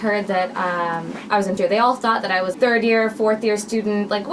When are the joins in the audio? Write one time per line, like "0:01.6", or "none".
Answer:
0:01.6
0:02.5